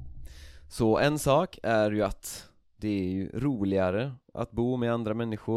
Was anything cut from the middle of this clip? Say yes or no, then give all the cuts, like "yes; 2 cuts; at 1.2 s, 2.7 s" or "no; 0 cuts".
no; 0 cuts